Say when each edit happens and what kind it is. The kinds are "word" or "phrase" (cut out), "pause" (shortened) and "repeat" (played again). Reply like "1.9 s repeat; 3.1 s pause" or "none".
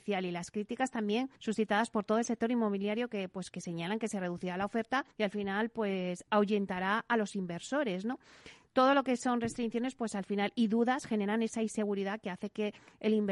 1.4 s pause; 5.1 s pause